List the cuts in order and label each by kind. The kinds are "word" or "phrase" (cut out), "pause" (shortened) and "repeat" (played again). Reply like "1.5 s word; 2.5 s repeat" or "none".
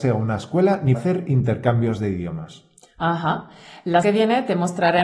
0.9 s word; 4.0 s word